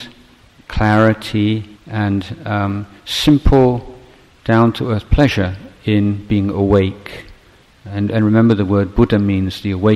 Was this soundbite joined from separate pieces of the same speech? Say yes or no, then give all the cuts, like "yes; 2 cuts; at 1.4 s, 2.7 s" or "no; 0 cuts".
yes; 1 cut; at 1.8 s